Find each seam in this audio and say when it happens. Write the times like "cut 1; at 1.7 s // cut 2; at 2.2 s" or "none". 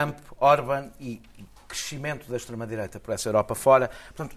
none